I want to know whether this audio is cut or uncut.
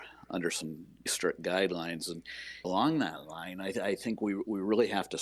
cut